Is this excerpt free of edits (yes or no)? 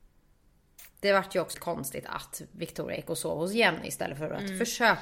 no